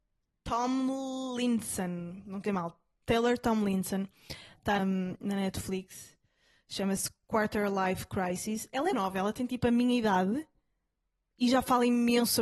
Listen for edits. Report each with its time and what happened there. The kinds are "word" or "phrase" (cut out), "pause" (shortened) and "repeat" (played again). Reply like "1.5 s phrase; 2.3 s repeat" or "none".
2.5 s word; 4.8 s word; 8.9 s word